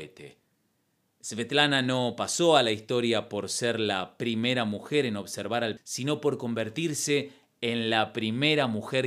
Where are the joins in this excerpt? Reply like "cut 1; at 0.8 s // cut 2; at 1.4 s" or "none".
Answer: cut 1; at 5.8 s